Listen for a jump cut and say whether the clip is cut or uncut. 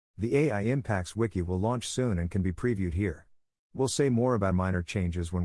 cut